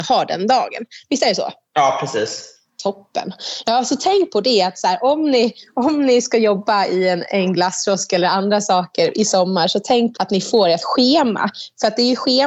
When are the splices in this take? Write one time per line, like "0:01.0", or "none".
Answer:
0:10.2